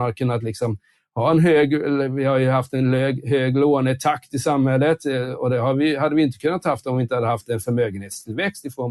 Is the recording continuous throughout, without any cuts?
yes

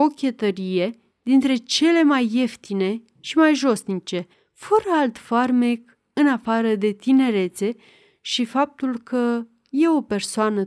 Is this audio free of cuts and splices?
no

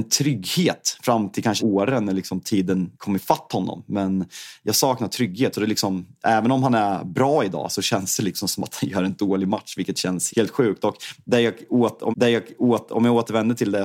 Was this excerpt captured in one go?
no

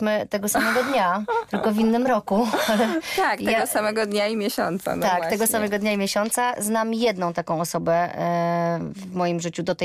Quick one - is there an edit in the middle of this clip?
no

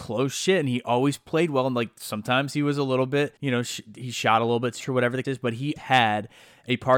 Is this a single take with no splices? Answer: no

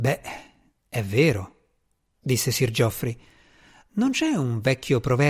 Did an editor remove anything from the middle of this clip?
no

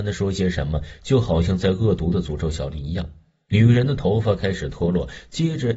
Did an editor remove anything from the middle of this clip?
no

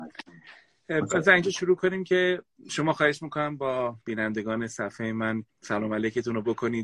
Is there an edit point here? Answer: yes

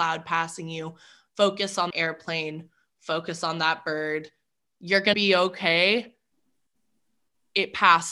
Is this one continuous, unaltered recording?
no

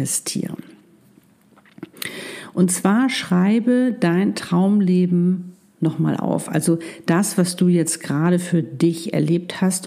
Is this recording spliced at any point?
no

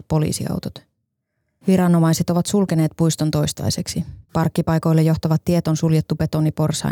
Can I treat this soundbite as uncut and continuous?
no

